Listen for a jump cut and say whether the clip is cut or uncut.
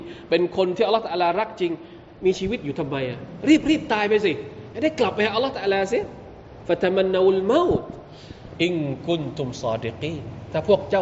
uncut